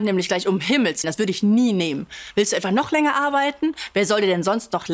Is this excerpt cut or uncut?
cut